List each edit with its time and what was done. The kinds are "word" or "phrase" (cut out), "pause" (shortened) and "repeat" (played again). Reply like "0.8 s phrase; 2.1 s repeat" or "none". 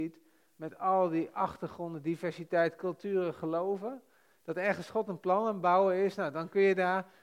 none